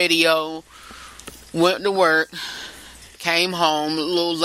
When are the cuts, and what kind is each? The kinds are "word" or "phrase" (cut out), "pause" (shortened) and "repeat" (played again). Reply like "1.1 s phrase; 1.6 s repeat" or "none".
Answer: none

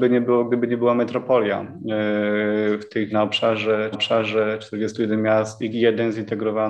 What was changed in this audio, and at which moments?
3.1 s word; 3.9 s repeat; 5.7 s phrase

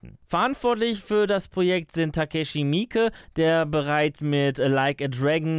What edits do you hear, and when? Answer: none

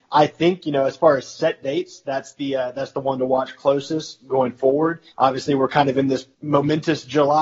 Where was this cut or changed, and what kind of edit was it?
5.1 s pause; 6.3 s pause

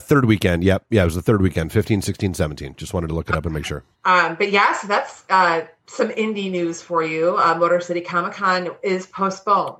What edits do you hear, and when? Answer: 3.9 s pause

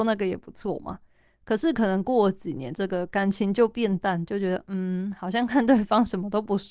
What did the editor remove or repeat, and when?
none

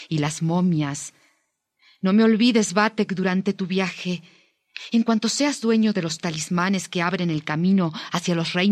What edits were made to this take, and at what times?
none

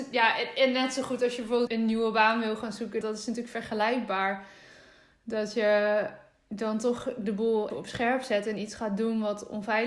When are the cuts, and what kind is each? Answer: 1.7 s word; 3.0 s word; 7.7 s word

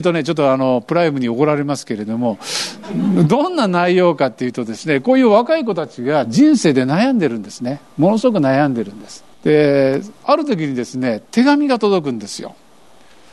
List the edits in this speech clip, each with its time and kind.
9.3 s pause; 11.3 s pause

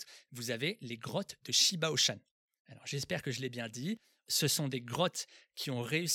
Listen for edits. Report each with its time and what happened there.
none

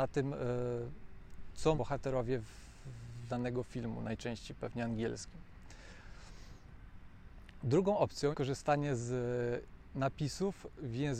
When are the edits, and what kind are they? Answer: 1.7 s word; 3.3 s word; 8.3 s word

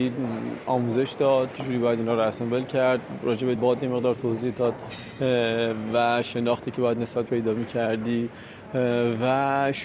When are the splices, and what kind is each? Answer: 1.6 s word; 3.6 s word; 7.3 s word

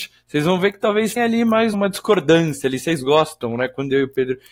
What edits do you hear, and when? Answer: 1.2 s word; 1.7 s word

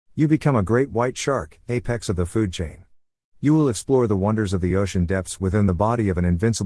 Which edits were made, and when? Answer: none

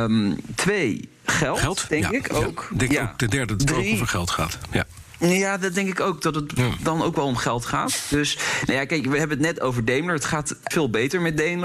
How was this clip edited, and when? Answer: 3.6 s word; 10.7 s word

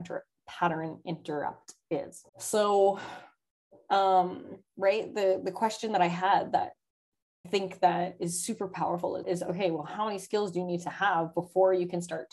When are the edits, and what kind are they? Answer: 2.3 s pause; 7.4 s word; 9.2 s word

